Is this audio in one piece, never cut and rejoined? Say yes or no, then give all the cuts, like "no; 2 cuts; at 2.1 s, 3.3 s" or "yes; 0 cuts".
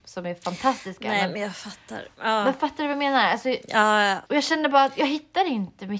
no; 1 cut; at 4.3 s